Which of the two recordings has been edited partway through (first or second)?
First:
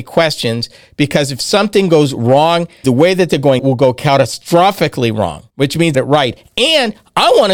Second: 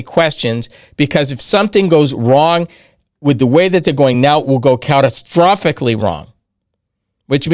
first